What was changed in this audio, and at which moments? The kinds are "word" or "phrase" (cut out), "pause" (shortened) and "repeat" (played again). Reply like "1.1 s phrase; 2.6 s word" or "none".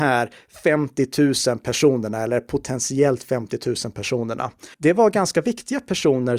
4.7 s pause